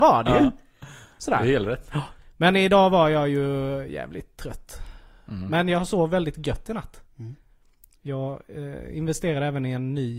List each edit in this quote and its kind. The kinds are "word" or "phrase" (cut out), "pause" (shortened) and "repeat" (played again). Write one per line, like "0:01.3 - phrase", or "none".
none